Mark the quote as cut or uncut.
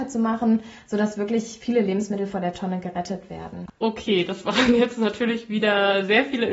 uncut